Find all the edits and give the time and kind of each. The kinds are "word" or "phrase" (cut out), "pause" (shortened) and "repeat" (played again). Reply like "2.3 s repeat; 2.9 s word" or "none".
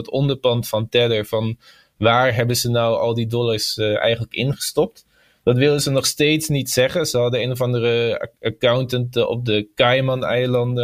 none